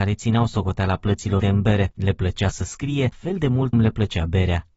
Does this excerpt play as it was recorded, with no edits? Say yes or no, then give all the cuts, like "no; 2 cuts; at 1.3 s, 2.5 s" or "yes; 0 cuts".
no; 4 cuts; at 1.4 s, 2.5 s, 3.1 s, 3.7 s